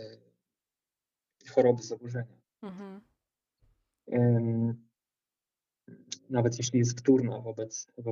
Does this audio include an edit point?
no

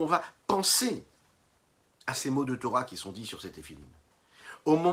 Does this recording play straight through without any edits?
yes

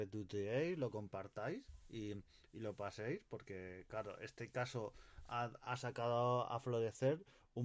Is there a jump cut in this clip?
no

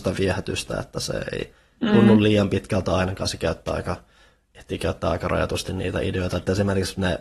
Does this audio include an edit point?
no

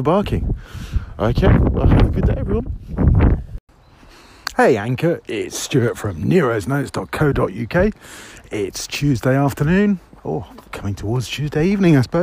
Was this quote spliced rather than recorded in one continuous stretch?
no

